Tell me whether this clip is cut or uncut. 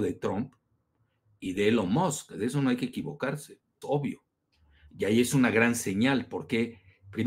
cut